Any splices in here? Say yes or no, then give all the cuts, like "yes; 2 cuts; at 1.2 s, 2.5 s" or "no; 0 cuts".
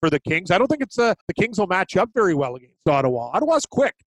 yes; 1 cut; at 1.2 s